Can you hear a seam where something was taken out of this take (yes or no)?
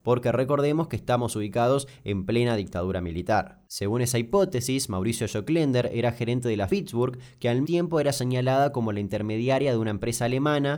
yes